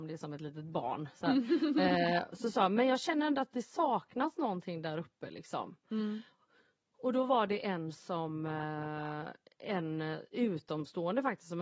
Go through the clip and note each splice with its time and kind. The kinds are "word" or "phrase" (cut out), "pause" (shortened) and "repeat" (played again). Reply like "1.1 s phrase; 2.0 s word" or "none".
none